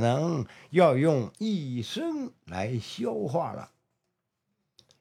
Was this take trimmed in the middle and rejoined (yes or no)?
yes